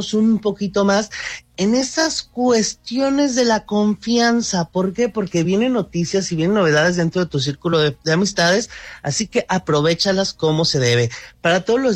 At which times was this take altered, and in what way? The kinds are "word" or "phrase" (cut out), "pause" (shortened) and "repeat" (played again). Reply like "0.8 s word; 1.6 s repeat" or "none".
none